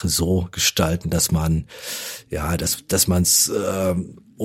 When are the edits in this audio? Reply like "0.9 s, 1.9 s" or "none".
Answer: none